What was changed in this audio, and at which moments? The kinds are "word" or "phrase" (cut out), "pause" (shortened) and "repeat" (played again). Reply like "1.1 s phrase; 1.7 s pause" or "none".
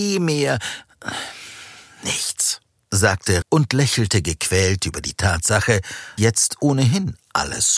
3.4 s word; 6.2 s word